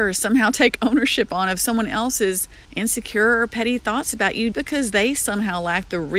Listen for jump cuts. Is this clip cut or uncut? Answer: cut